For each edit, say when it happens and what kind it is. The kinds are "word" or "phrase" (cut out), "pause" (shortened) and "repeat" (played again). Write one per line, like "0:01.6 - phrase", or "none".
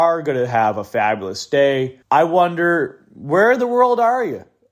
0:02.0 - pause